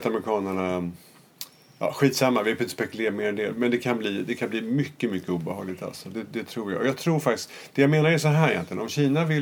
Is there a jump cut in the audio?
no; 0 cuts

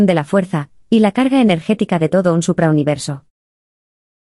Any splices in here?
no; 0 cuts

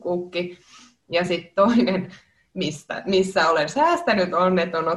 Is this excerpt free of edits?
yes; 0 cuts

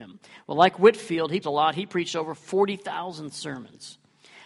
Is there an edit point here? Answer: yes; 1 cut; at 1.4 s

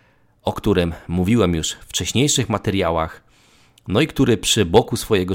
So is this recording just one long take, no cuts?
yes; 0 cuts

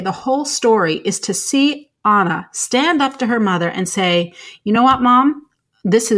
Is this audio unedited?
yes; 0 cuts

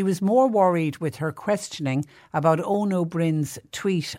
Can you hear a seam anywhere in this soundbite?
no; 0 cuts

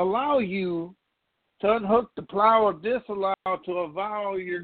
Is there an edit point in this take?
no; 0 cuts

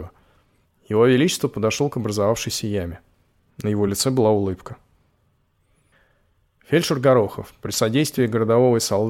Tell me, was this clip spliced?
no; 0 cuts

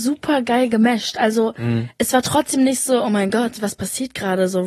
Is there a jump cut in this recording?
no; 0 cuts

